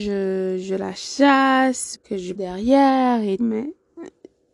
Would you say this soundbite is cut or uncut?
cut